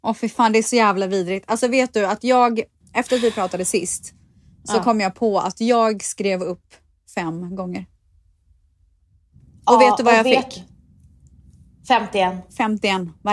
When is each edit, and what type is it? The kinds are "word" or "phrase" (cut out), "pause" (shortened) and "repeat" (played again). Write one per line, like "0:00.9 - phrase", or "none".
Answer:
none